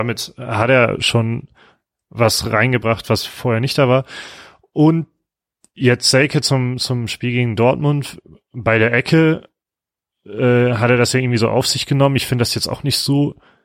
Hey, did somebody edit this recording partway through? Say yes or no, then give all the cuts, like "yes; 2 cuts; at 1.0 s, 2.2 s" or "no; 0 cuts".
no; 0 cuts